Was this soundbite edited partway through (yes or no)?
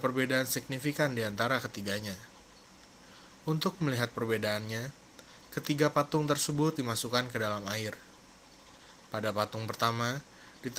yes